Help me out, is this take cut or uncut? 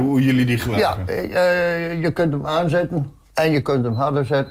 cut